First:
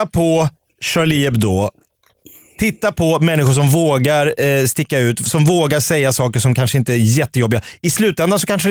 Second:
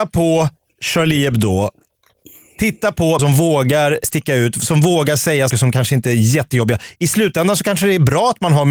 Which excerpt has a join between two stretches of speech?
second; 3 cuts; at 3.2 s, 4.0 s, 5.5 s

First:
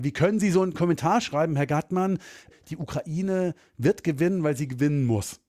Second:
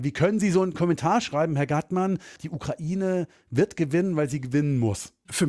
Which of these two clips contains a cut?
second; 1 cut; at 2.4 s

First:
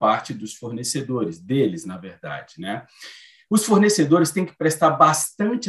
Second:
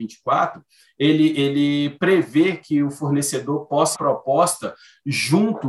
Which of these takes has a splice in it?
second; 1 cut; at 3.9 s

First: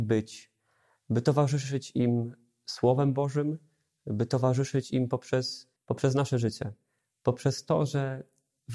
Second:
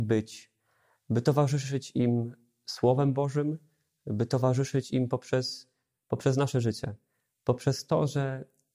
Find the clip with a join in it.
first; 1 cut; at 5.8 s

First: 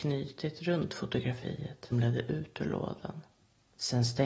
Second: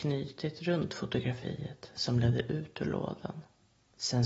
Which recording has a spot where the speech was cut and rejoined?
first; 1 cut; at 1.9 s

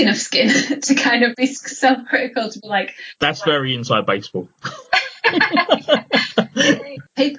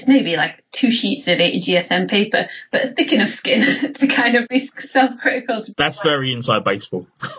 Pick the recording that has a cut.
second; 1 cut; at 5.7 s

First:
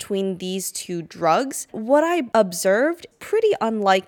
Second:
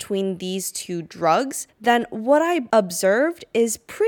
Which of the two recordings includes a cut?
first; 2 cuts; at 1.7 s, 3.1 s

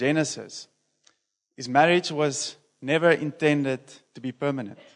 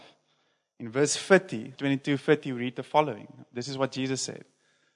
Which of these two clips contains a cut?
second; 1 cut; at 1.8 s

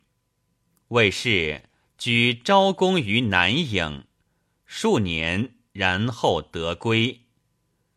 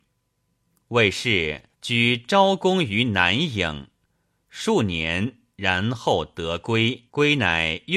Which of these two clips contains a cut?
second; 2 cuts; at 1.7 s, 7.1 s

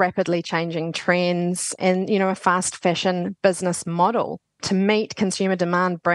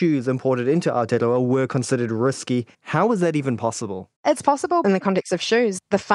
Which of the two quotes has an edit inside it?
second; 3 cuts; at 2.7 s, 4.2 s, 4.8 s

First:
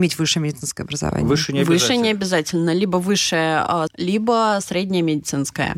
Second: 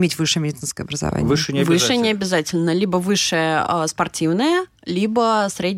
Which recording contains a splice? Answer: first; 1 cut; at 3.9 s

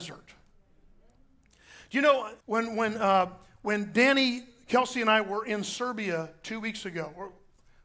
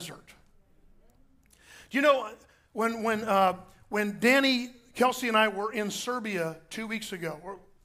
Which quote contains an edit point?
first; 1 cut; at 2.4 s

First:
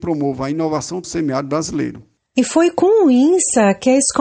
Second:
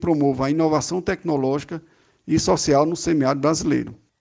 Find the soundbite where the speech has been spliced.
first; 1 cut; at 1.0 s

